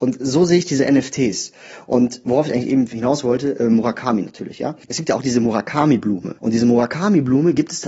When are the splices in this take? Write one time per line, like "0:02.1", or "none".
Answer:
0:04.8
0:06.4